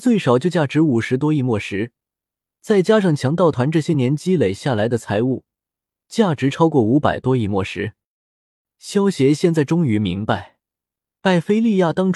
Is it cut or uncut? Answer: uncut